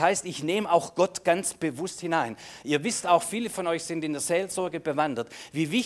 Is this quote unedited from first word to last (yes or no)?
yes